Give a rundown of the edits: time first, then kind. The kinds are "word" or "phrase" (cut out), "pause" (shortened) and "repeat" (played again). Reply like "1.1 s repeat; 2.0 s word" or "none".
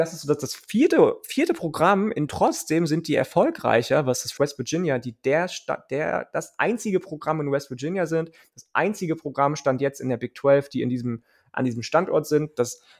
2.3 s phrase; 4.4 s phrase